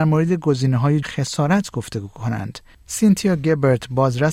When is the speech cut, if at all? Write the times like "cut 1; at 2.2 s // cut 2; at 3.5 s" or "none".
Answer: cut 1; at 1.0 s